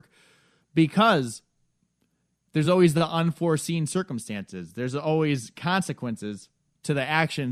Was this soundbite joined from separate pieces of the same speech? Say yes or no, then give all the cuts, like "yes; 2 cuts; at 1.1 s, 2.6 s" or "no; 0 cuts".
no; 0 cuts